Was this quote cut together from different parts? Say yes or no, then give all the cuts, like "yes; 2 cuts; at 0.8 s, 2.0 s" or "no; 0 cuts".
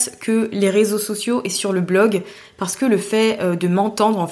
no; 0 cuts